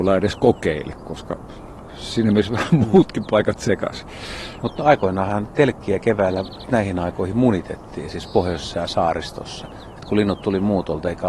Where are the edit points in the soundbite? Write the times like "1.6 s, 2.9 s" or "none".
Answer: 6.7 s